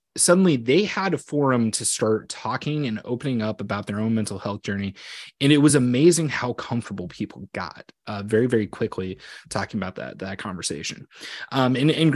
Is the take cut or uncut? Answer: uncut